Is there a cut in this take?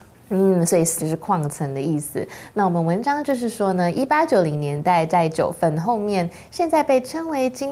yes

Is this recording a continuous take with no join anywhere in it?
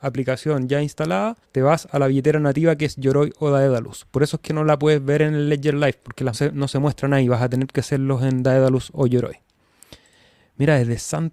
no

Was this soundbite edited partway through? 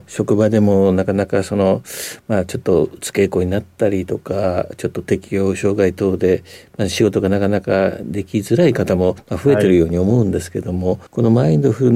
yes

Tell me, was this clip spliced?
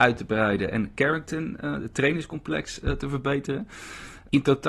no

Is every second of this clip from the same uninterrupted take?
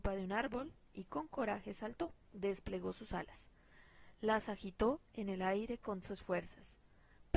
no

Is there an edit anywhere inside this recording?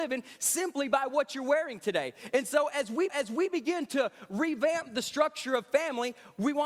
yes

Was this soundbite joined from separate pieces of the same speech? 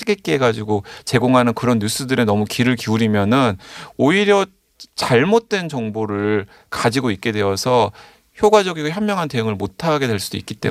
no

